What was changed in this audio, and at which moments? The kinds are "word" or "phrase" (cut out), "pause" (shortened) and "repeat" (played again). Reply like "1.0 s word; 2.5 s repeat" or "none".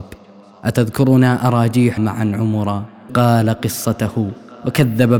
2.0 s word; 3.1 s word